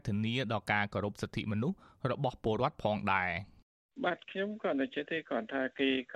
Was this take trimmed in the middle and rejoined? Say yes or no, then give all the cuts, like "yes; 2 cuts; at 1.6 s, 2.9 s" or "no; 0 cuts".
no; 0 cuts